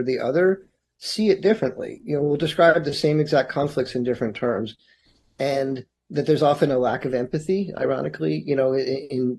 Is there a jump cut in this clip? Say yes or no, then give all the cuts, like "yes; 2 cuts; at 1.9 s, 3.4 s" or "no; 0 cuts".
no; 0 cuts